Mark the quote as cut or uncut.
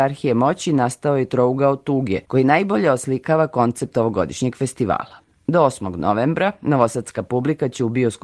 cut